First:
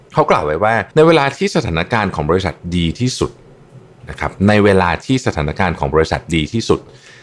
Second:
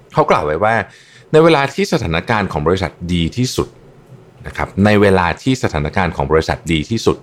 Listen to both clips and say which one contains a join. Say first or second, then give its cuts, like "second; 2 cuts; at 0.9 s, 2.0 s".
first; 1 cut; at 0.9 s